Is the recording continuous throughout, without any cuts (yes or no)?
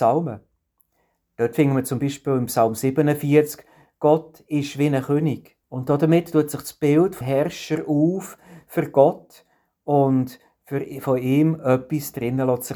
no